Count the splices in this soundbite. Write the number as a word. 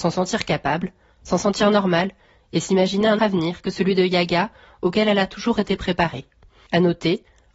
one